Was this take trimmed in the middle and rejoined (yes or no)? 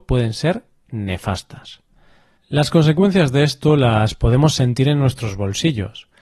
no